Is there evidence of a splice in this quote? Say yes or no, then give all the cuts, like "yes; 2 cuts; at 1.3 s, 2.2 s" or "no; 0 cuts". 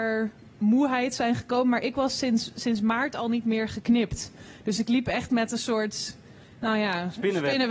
no; 0 cuts